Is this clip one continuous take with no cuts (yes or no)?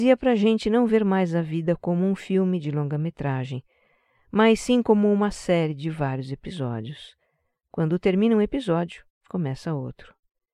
yes